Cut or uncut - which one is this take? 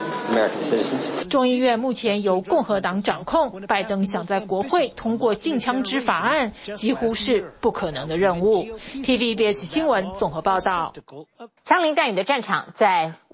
cut